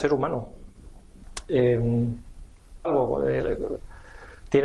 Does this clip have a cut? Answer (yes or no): yes